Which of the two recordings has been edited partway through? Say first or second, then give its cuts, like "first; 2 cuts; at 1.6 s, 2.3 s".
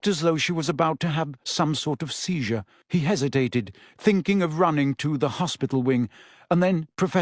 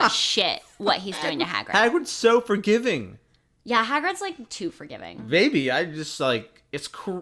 first; 1 cut; at 2.8 s